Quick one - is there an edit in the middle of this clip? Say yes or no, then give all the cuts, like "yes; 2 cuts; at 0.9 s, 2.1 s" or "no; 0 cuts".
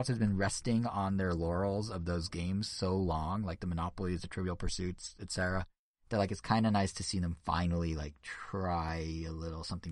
no; 0 cuts